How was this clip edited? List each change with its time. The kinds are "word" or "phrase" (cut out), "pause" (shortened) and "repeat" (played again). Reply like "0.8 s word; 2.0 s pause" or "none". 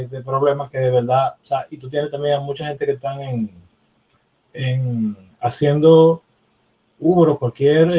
none